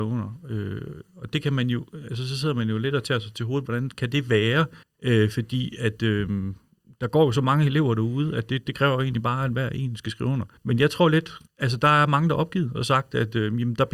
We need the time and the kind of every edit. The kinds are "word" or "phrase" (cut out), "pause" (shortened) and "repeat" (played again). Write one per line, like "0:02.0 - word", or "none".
0:04.8 - pause
0:06.8 - pause
0:10.6 - pause
0:11.5 - pause